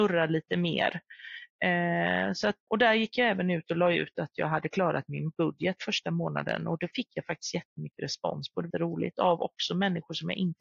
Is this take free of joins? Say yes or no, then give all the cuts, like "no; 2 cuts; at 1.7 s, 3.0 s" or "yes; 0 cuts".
no; 2 cuts; at 2.7 s, 8.7 s